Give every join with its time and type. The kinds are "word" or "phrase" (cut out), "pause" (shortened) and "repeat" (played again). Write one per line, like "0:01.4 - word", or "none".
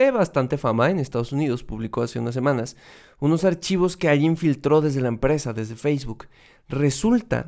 none